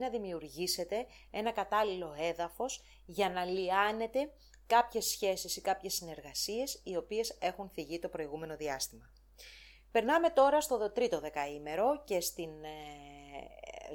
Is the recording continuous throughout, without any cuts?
yes; 0 cuts

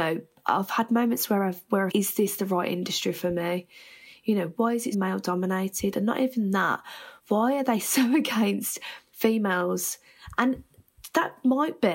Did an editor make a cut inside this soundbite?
yes; 5 cuts; at 1.9 s, 4.5 s, 4.9 s, 7.2 s, 9.1 s

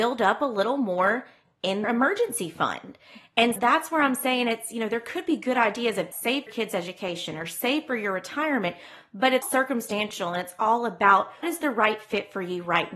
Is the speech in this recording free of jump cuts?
no; 6 cuts; at 1.8 s, 3.6 s, 6.1 s, 6.5 s, 9.4 s, 11.4 s

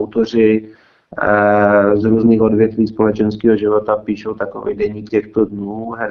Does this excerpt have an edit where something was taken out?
no; 0 cuts

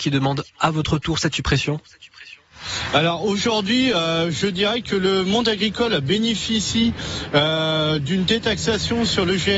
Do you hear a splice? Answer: no; 0 cuts

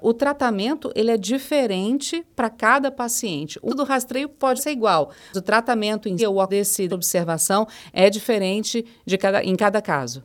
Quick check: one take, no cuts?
no; 6 cuts; at 3.7 s, 4.6 s, 5.3 s, 6.2 s, 6.5 s, 6.9 s

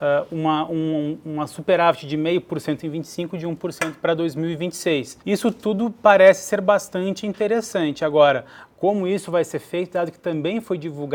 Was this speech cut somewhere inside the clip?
yes; 1 cut; at 5.2 s

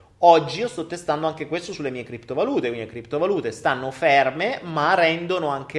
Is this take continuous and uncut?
yes; 0 cuts

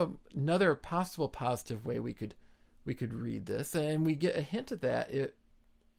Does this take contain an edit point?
no; 0 cuts

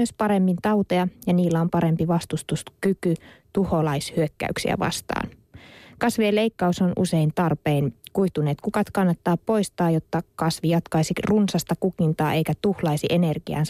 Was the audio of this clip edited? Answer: no; 0 cuts

